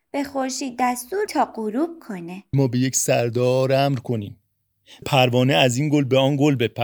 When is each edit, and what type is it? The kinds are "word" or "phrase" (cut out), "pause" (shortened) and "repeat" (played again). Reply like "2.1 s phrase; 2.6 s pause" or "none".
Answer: 1.3 s word; 2.5 s word; 5.0 s word